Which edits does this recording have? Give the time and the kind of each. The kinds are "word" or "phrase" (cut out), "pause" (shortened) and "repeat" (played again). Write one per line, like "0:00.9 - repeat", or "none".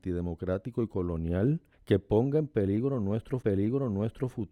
0:01.7 - pause
0:03.4 - repeat

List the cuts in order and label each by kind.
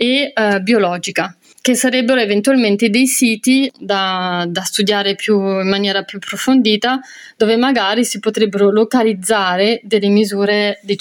none

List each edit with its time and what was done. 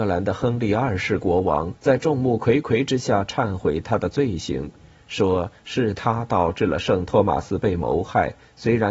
0:01.8 - pause

